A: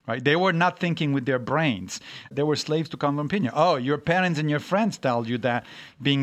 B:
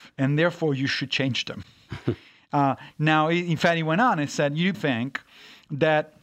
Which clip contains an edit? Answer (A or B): B